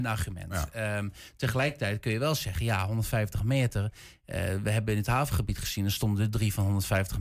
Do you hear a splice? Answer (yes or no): no